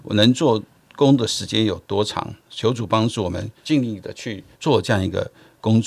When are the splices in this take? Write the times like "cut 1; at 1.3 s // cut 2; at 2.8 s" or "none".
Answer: cut 1; at 2.4 s // cut 2; at 3.6 s // cut 3; at 4.5 s